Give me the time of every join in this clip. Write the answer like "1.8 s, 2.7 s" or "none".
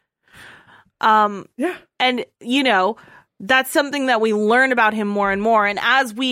none